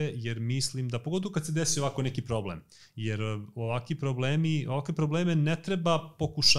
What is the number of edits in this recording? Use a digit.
0